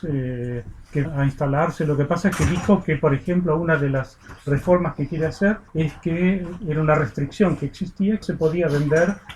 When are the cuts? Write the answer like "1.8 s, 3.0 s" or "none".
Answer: 1.0 s, 5.7 s, 8.2 s